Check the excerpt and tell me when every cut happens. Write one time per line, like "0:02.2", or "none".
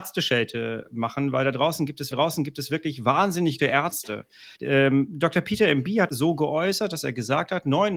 0:02.1
0:03.6
0:04.5
0:06.1